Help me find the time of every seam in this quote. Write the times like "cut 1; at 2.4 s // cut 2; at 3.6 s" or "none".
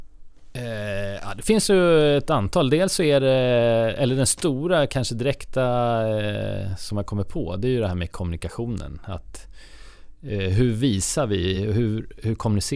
none

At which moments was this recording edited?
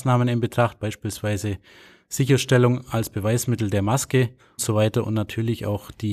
cut 1; at 4.6 s

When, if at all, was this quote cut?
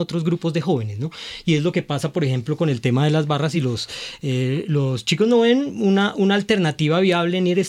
none

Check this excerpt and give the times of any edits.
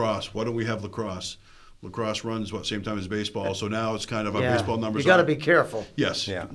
none

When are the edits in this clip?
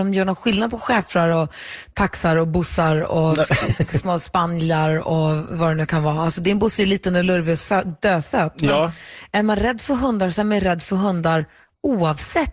none

